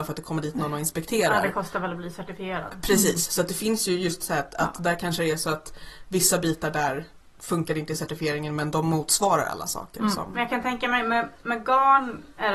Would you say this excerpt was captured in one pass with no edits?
no; 1 cut; at 7.3 s

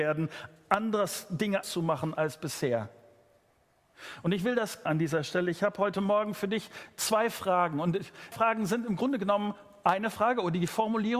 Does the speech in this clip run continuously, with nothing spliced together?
no; 3 cuts; at 1.6 s, 4.9 s, 8.3 s

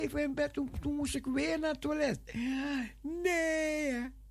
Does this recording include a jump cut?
no; 0 cuts

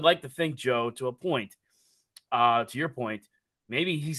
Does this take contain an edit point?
no; 0 cuts

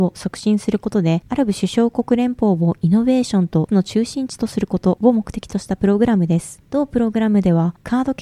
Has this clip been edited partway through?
yes; 1 cut; at 3.7 s

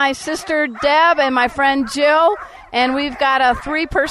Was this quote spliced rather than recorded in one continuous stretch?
no; 0 cuts

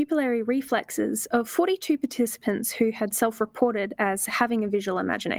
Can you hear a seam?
no; 0 cuts

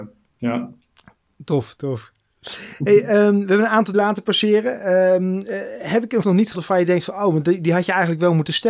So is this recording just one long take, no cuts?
no; 4 cuts; at 1.8 s, 3.9 s, 6.2 s, 6.5 s

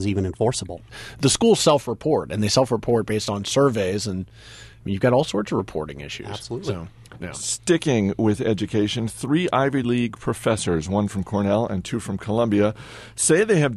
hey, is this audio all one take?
yes; 0 cuts

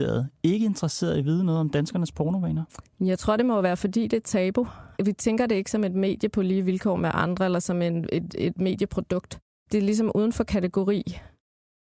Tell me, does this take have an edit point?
no; 0 cuts

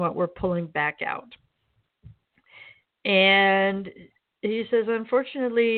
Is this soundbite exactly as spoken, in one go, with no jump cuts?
yes; 0 cuts

